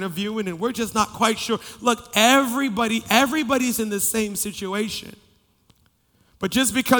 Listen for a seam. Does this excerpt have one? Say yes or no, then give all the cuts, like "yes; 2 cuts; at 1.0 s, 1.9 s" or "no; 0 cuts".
no; 0 cuts